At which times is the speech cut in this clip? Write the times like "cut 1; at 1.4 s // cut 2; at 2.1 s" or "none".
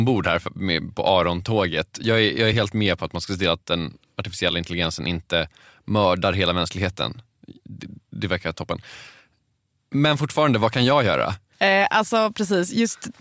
none

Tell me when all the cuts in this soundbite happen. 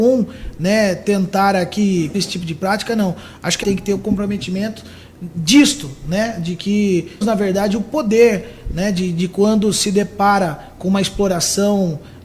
cut 1; at 2.1 s // cut 2; at 3.6 s // cut 3; at 7.2 s

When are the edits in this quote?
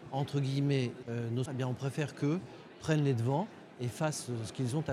cut 1; at 1.0 s // cut 2; at 1.5 s

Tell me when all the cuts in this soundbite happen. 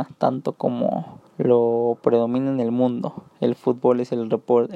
cut 1; at 1.3 s

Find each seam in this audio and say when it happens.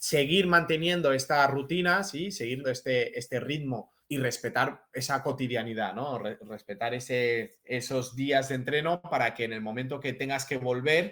cut 1; at 2.6 s // cut 2; at 4.0 s // cut 3; at 7.6 s

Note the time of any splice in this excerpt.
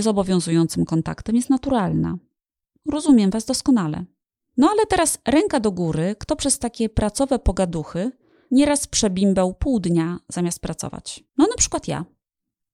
cut 1; at 11.3 s

